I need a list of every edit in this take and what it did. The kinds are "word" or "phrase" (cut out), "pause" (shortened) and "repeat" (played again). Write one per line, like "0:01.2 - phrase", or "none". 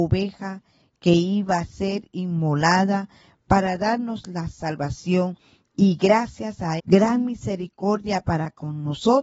0:06.8 - word